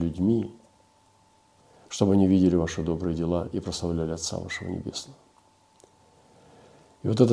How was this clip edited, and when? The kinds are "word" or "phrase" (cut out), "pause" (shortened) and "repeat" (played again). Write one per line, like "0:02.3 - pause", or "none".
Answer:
none